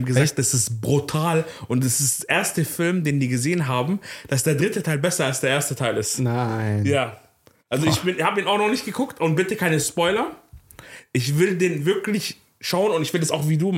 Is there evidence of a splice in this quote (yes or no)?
no